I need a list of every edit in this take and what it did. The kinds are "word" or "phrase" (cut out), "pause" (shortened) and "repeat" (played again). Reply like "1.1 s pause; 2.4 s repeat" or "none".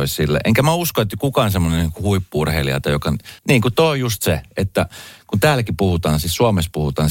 3.4 s pause